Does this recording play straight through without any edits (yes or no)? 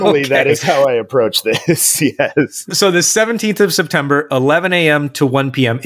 yes